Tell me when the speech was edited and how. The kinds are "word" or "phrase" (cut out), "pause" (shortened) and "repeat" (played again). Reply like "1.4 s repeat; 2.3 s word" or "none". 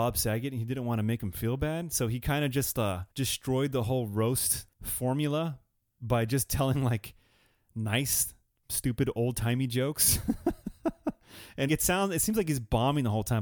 3.1 s pause; 4.7 s pause; 11.7 s word

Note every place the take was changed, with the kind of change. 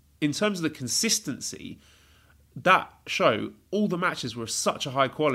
none

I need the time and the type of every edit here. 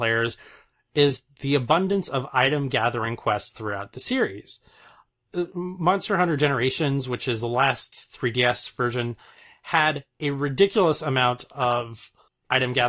none

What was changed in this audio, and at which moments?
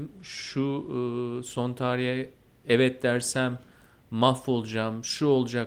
none

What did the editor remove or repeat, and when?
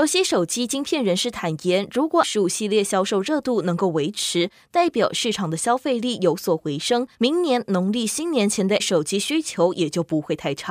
2.2 s word; 7.1 s pause; 8.8 s word

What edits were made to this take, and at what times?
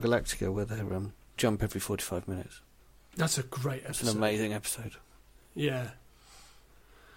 1.4 s phrase

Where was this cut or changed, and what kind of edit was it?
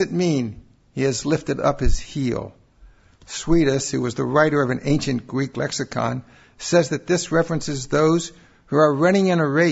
none

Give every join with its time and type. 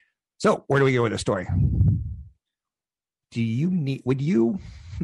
none

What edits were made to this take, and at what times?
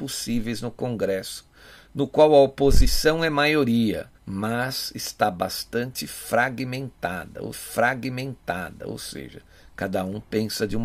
4.2 s pause; 7.5 s repeat

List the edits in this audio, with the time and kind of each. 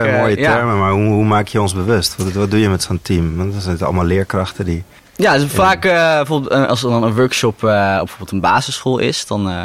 5.0 s pause

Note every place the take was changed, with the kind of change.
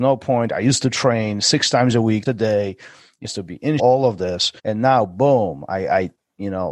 2.3 s word; 3.2 s phrase; 3.8 s phrase; 4.6 s pause

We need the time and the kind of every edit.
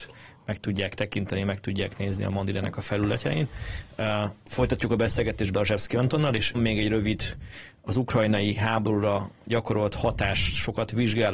5.5 s word; 6.5 s word

